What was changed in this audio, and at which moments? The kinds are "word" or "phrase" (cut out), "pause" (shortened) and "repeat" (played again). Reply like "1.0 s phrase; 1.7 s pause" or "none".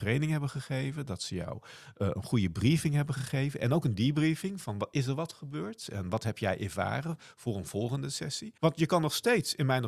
8.6 s pause